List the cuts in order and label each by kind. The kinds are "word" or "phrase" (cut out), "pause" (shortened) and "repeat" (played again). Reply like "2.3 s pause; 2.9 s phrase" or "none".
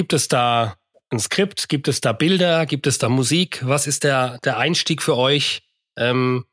none